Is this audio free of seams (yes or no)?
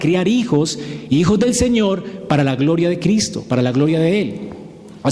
yes